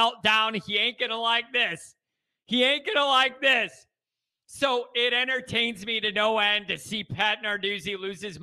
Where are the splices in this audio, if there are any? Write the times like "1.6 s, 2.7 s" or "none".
none